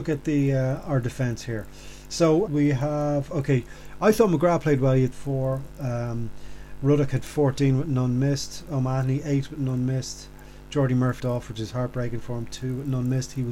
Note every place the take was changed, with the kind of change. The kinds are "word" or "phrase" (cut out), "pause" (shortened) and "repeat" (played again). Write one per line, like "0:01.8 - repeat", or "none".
0:02.5 - word
0:05.1 - phrase
0:11.2 - phrase